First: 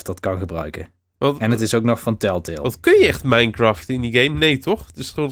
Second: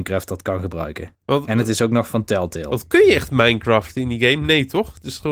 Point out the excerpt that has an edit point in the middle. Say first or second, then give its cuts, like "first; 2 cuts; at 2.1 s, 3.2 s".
second; 1 cut; at 1.1 s